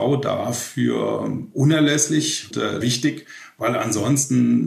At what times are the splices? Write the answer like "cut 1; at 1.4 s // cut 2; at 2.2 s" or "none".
cut 1; at 2.5 s // cut 2; at 2.8 s